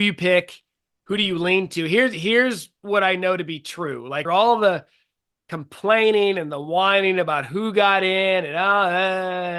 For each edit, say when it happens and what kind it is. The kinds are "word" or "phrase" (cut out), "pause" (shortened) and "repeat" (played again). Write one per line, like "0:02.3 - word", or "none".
0:04.2 - word